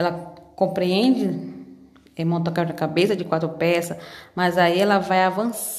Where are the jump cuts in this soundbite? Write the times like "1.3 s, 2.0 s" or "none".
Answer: none